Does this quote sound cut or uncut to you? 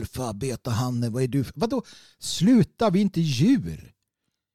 uncut